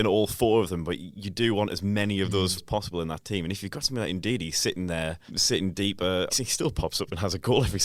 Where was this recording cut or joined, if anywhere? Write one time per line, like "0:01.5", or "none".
0:02.6
0:05.3
0:06.3